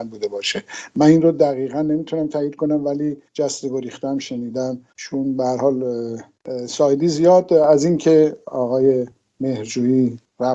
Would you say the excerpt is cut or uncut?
uncut